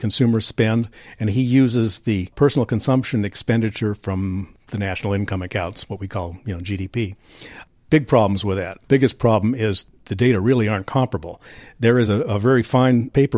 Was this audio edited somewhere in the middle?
no; 0 cuts

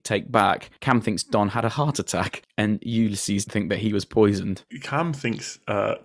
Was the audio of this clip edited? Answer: yes; 1 cut; at 3.5 s

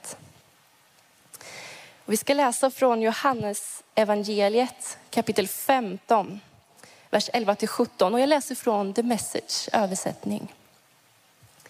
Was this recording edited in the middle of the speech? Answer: no; 0 cuts

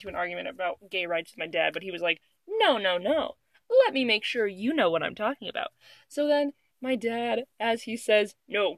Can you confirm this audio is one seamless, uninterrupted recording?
yes; 0 cuts

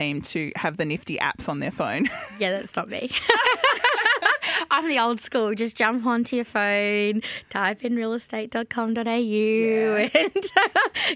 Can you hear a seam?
no; 0 cuts

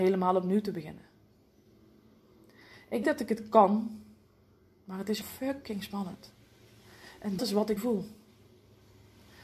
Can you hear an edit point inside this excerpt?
yes; 4 cuts; at 3.0 s, 5.2 s, 7.4 s, 7.8 s

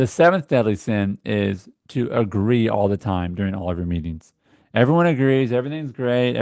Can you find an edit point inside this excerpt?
no; 0 cuts

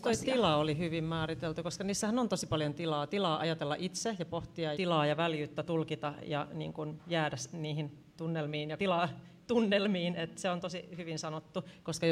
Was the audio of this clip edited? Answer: yes; 2 cuts; at 4.7 s, 8.8 s

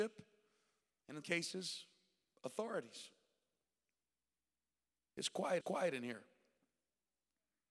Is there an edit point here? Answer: yes; 2 cuts; at 1.2 s, 5.6 s

